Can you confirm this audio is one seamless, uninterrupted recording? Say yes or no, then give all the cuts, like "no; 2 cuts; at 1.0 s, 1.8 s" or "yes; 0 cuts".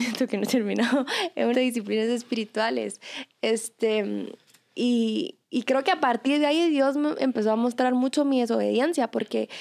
no; 2 cuts; at 1.5 s, 5.4 s